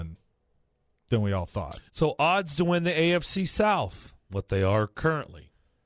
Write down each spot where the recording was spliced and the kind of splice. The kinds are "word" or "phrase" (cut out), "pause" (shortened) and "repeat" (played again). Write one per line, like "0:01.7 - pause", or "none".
0:01.9 - pause